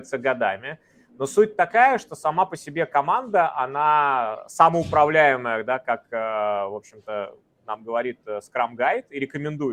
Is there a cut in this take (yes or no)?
no